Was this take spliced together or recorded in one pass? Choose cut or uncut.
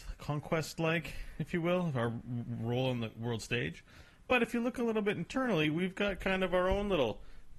uncut